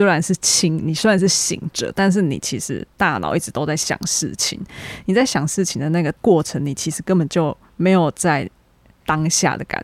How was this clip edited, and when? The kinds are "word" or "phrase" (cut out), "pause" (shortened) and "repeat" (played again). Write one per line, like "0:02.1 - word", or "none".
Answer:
0:06.2 - pause
0:07.6 - pause

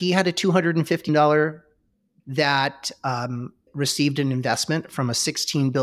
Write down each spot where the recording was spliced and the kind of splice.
0:01.1 - word
0:02.2 - word
0:03.7 - word

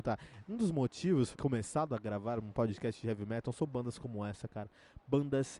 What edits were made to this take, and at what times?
0:01.3 - phrase

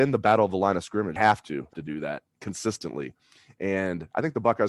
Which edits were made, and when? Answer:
0:01.2 - phrase
0:01.7 - word

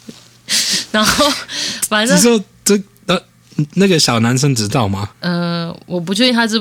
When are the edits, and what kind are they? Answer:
0:05.1 - pause

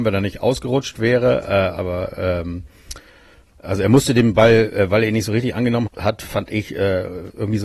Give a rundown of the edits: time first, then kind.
0:05.9 - word

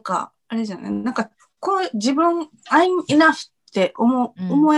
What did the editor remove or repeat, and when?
none

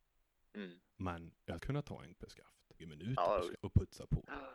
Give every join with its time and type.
0:01.6 - word
0:02.2 - word
0:02.8 - word
0:03.5 - word

